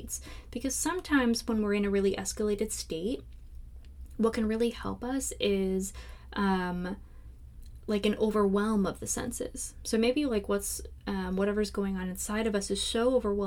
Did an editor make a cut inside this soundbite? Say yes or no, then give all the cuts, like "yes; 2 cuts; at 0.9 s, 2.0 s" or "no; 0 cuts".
no; 0 cuts